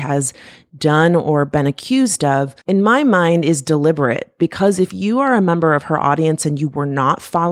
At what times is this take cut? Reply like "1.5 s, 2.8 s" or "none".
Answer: 2.6 s